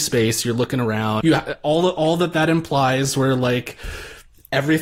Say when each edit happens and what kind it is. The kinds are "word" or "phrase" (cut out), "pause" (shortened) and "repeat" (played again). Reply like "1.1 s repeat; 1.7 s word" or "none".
1.2 s word